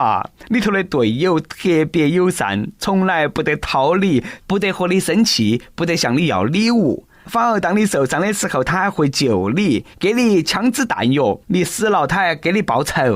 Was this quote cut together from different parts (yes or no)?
yes